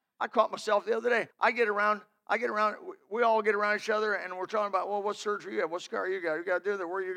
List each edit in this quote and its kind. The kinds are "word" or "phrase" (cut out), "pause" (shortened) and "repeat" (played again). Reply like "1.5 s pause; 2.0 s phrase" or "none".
1.3 s pause